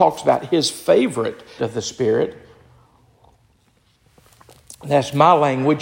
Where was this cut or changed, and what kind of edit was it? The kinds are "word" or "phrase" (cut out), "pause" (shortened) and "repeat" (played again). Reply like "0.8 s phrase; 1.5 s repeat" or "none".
1.6 s word